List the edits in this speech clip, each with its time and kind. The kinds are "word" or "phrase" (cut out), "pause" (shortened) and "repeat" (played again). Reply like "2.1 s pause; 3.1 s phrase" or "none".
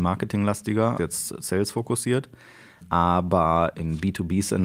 1.0 s word; 3.7 s word